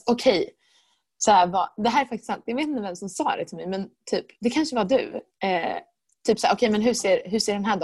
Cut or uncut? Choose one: uncut